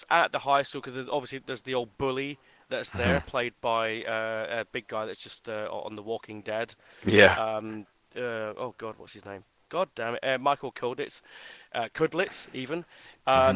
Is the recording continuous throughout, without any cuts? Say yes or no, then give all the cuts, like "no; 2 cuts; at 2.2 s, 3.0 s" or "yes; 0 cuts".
yes; 0 cuts